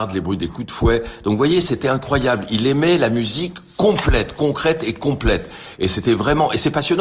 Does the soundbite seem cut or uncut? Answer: uncut